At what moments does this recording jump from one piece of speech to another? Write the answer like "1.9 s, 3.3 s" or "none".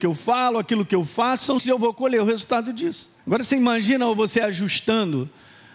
1.6 s, 3.2 s